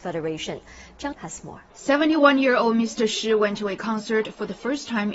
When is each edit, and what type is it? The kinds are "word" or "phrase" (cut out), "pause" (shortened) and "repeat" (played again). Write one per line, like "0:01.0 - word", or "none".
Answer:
0:01.1 - word
0:01.7 - pause